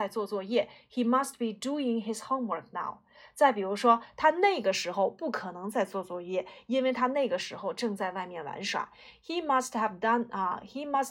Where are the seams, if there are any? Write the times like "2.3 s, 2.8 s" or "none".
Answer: none